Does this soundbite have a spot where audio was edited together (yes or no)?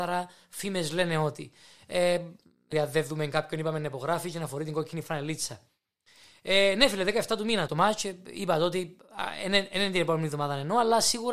yes